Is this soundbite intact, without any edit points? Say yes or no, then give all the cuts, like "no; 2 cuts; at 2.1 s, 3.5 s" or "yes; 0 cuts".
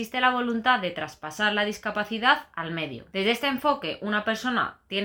no; 1 cut; at 3.1 s